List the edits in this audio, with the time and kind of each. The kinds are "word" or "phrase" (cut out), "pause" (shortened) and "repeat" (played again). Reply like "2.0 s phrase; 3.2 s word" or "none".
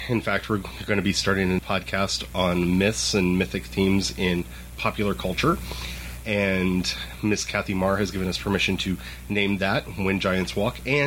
1.6 s word